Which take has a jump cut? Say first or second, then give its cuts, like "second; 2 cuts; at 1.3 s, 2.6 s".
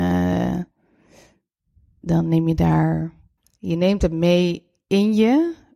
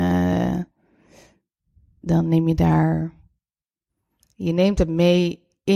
first; 1 cut; at 3.4 s